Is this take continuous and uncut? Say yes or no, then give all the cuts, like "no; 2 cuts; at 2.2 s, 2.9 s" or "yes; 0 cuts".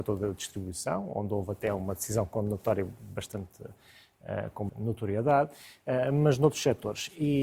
no; 1 cut; at 4.7 s